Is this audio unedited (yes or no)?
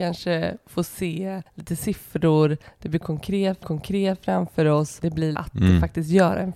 no